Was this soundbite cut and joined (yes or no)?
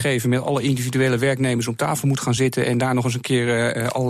no